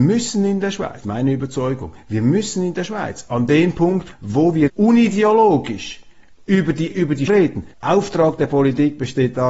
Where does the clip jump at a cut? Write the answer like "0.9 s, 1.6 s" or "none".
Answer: 1.0 s, 4.1 s, 4.7 s, 6.9 s, 7.3 s, 7.7 s